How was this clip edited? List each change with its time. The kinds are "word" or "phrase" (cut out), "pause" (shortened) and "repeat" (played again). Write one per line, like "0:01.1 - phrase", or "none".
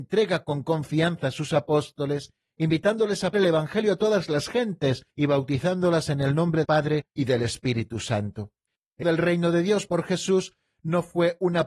0:03.3 - word
0:05.1 - pause
0:06.6 - word
0:07.2 - phrase
0:09.0 - word
0:09.9 - word